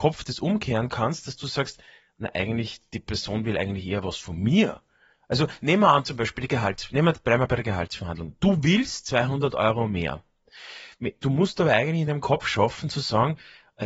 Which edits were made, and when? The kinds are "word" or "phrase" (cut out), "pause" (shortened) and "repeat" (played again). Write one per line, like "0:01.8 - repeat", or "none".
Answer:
none